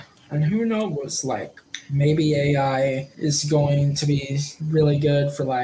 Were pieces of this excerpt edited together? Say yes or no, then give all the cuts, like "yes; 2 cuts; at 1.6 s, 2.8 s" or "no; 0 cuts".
yes; 1 cut; at 4.6 s